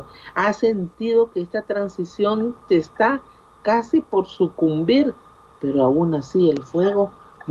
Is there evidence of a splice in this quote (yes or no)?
no